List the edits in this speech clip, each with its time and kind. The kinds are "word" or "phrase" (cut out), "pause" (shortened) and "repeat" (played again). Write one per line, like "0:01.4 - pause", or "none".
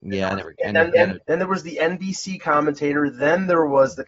0:00.9 - phrase
0:01.2 - pause
0:02.4 - word

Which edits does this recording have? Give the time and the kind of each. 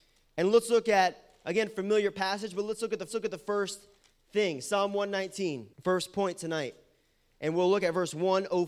0:03.1 - repeat
0:05.7 - pause

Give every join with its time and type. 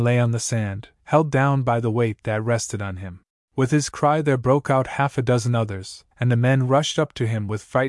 0:00.9 - pause
0:03.3 - pause
0:06.1 - pause

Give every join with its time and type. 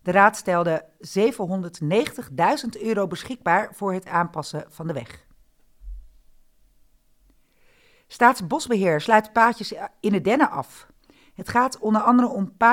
none

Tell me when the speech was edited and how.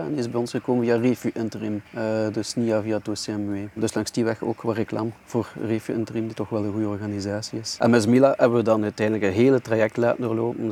none

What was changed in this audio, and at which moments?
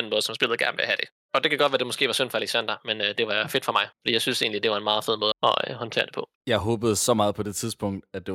0:03.9 - pause
0:05.3 - word
0:06.4 - pause

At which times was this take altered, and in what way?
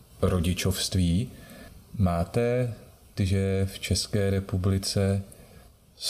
0:03.2 - word

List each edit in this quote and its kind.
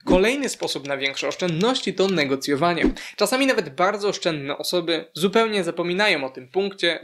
none

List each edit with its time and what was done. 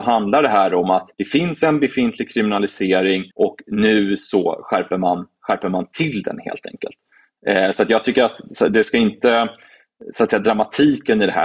0:01.1 - pause
0:03.3 - pause

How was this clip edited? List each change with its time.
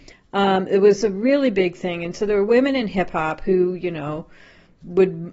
none

